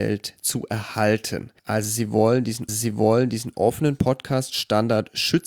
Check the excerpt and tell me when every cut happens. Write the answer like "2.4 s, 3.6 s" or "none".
1.6 s, 2.7 s